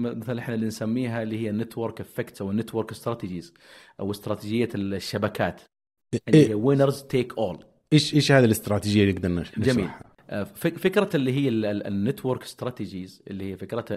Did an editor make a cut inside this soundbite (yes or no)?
no